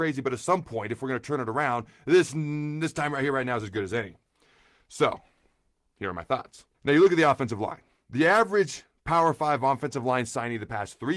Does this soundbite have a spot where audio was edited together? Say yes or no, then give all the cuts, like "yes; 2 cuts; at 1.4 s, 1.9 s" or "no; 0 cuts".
yes; 1 cut; at 6.7 s